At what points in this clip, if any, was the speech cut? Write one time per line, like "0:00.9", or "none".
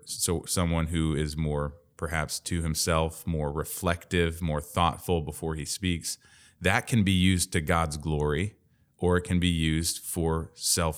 none